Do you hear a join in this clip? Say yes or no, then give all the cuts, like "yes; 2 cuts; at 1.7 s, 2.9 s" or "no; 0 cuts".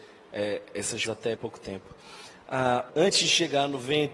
yes; 3 cuts; at 1.0 s, 1.4 s, 2.9 s